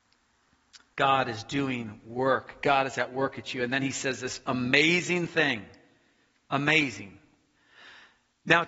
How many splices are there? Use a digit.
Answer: 0